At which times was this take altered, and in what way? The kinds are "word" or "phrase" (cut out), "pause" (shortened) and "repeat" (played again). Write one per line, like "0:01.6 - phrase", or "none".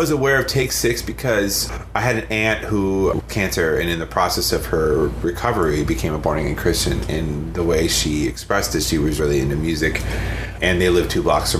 0:03.3 - phrase
0:09.2 - word